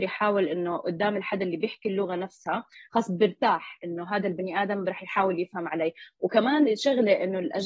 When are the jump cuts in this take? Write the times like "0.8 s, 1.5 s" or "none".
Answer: none